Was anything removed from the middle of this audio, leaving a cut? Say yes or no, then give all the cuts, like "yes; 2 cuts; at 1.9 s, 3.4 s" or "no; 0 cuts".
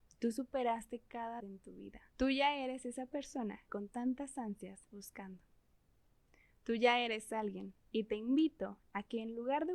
yes; 5 cuts; at 1.4 s, 2.1 s, 3.7 s, 4.9 s, 7.8 s